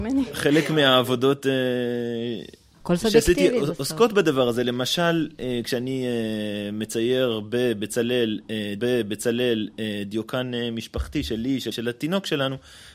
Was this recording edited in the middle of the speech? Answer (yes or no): yes